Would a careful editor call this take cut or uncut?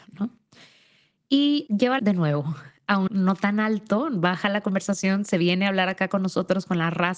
cut